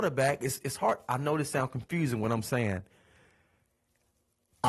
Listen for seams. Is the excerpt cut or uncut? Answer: uncut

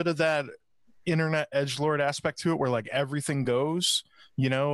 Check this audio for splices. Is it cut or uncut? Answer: uncut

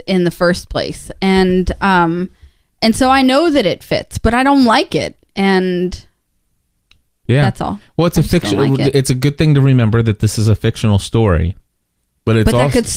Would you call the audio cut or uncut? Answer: uncut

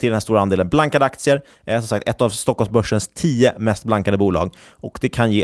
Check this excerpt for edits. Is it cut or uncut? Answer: uncut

